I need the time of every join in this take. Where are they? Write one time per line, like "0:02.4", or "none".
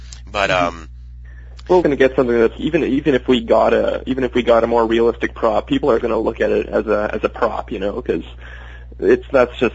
0:01.8
0:02.6
0:06.0